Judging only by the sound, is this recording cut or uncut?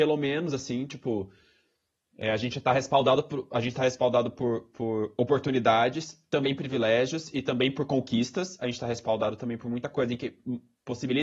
uncut